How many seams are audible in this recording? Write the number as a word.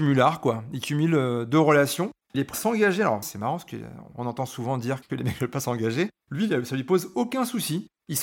one